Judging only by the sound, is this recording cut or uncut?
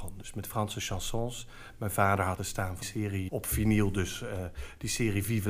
cut